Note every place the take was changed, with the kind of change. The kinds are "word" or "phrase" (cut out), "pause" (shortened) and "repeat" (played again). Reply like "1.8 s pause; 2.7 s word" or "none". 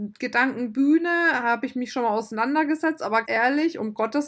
3.2 s word